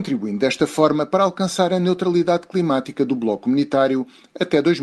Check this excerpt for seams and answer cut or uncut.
uncut